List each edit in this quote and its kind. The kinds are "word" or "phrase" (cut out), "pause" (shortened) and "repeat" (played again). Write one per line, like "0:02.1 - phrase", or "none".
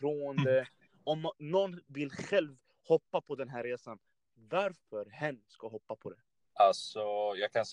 none